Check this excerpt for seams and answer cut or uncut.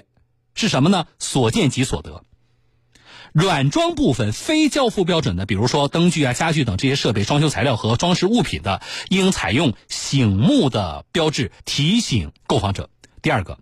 cut